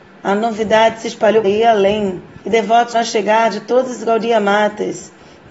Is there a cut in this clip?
yes; 3 cuts; at 1.4 s, 2.4 s, 2.9 s

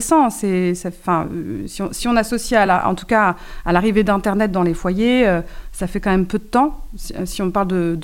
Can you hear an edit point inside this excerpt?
no; 0 cuts

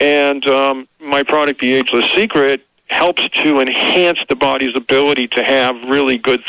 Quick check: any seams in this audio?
no; 0 cuts

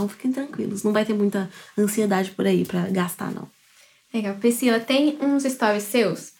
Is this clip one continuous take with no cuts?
yes; 0 cuts

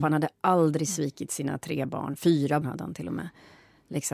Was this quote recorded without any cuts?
no; 1 cut; at 2.6 s

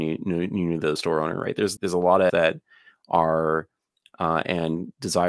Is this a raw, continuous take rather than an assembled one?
no; 4 cuts; at 1.0 s, 1.8 s, 2.3 s, 4.0 s

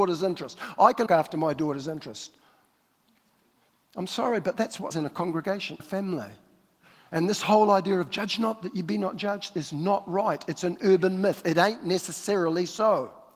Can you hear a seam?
yes; 3 cuts; at 1.1 s, 4.9 s, 5.8 s

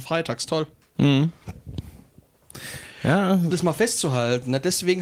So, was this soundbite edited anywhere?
yes; 1 cut; at 3.5 s

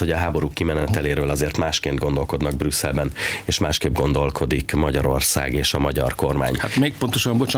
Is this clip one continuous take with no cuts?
yes; 0 cuts

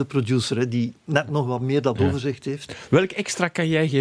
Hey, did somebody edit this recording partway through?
no; 0 cuts

